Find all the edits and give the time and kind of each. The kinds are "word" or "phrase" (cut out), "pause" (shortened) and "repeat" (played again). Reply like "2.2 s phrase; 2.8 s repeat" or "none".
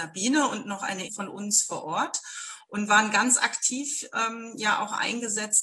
1.1 s phrase